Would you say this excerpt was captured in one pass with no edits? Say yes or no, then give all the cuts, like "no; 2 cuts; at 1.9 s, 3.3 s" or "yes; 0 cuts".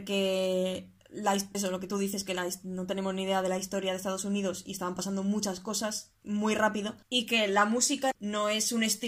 no; 2 cuts; at 1.5 s, 7.0 s